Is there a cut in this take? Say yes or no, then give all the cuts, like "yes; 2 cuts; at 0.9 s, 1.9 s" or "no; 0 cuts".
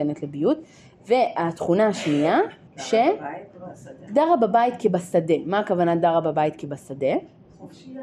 yes; 1 cut; at 2.7 s